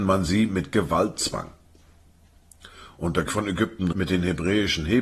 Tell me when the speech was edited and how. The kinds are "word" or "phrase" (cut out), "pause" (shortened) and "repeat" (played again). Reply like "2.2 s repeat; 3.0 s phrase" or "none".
3.3 s word; 3.9 s word